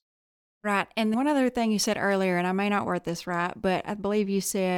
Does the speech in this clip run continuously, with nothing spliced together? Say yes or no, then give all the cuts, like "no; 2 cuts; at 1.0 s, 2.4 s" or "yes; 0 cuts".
no; 1 cut; at 1.1 s